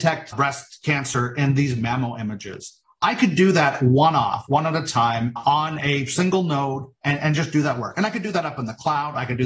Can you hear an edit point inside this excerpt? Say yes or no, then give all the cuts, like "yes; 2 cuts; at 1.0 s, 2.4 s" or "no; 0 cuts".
no; 0 cuts